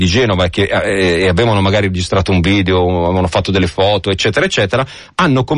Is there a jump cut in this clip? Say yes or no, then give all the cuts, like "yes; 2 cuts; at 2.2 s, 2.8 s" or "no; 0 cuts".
no; 0 cuts